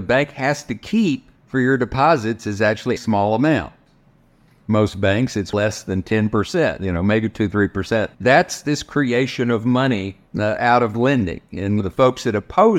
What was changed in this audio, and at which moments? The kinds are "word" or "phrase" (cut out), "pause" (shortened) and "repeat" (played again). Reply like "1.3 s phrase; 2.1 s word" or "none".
1.4 s pause; 3.0 s phrase; 5.5 s word; 8.1 s pause; 10.3 s pause